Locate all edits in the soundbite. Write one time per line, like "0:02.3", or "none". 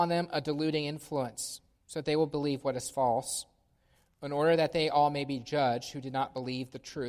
none